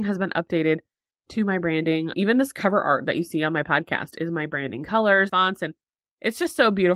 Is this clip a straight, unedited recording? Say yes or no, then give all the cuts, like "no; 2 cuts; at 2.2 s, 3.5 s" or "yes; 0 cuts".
no; 1 cut; at 5.3 s